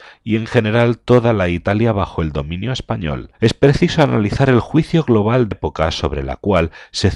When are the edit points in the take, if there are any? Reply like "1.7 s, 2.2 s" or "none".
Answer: 3.3 s, 5.5 s